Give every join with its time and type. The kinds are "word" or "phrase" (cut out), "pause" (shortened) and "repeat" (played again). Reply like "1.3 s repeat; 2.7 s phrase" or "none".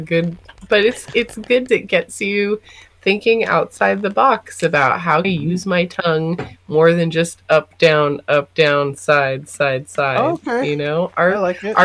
1.7 s word; 5.2 s phrase; 8.9 s word